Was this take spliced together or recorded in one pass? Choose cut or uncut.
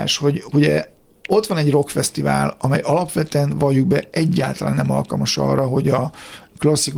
uncut